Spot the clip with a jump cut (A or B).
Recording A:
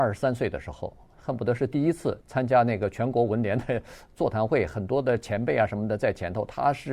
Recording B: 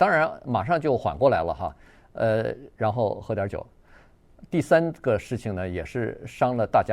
A